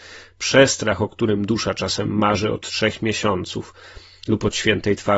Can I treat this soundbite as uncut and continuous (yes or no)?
yes